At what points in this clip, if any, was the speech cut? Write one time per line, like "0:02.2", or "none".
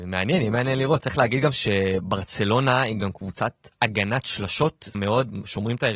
0:04.9